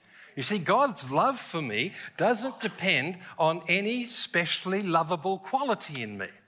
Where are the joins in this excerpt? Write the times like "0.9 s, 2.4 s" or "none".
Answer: none